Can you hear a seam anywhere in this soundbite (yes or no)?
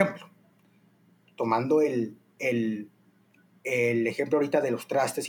no